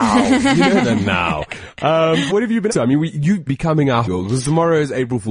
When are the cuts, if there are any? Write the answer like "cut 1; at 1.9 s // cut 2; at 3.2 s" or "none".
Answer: cut 1; at 2.3 s // cut 2; at 2.7 s // cut 3; at 3.5 s // cut 4; at 4.0 s